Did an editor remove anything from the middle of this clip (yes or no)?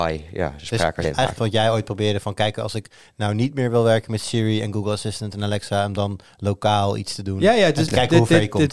yes